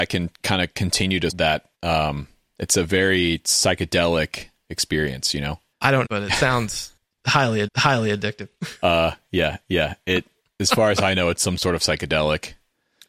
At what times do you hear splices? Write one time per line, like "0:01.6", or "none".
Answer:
0:01.3
0:01.7
0:05.7
0:06.0
0:07.0
0:07.7
0:09.6